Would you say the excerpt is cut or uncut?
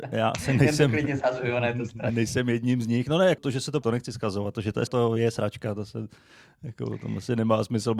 cut